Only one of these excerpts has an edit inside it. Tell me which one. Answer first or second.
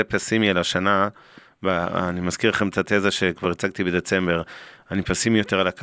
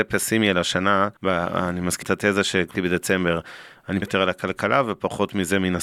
second